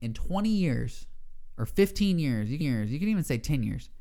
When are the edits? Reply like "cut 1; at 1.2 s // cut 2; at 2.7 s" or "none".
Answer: cut 1; at 2.6 s